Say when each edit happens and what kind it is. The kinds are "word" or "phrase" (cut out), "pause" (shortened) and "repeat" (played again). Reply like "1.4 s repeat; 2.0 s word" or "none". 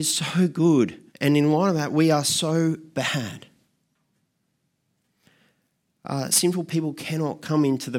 1.1 s pause